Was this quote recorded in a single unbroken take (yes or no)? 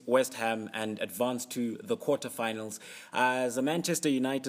yes